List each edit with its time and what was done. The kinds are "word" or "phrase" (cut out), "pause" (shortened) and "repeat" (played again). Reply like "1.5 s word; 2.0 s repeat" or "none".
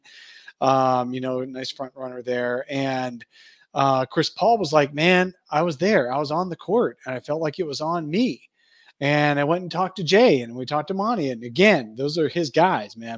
none